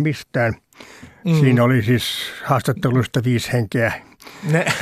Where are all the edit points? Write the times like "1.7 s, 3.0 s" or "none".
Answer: none